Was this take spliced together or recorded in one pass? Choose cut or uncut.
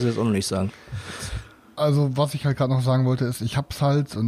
uncut